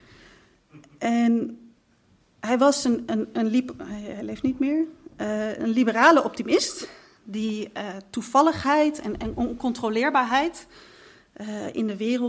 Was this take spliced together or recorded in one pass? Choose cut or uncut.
uncut